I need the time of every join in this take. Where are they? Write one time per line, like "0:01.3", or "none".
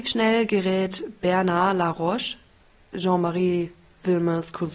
none